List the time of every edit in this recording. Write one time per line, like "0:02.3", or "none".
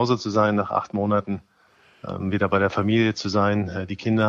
none